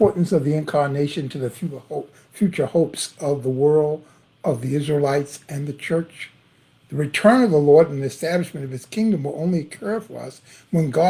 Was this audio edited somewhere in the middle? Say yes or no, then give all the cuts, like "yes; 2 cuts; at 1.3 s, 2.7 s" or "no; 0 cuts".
no; 0 cuts